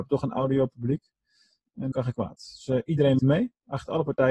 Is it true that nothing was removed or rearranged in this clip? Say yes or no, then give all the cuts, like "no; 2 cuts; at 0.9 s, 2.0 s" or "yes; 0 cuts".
no; 2 cuts; at 1.9 s, 3.2 s